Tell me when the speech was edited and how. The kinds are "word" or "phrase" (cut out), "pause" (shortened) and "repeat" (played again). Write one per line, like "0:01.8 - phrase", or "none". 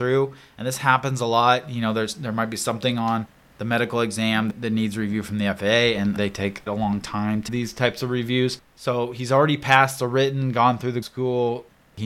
0:06.2 - word
0:06.7 - word
0:07.5 - word
0:11.0 - word